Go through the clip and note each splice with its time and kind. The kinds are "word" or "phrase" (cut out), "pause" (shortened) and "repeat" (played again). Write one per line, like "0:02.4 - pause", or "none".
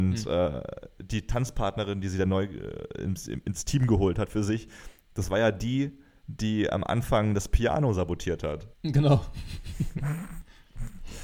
0:08.7 - pause